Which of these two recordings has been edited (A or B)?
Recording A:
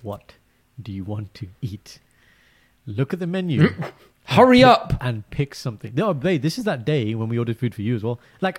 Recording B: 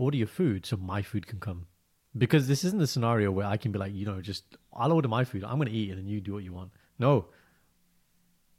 A